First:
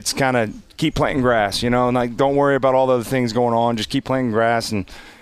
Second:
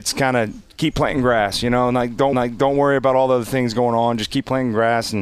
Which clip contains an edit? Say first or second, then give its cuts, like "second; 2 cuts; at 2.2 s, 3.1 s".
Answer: second; 1 cut; at 2.3 s